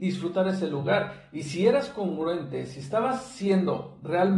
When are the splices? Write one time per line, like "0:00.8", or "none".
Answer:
none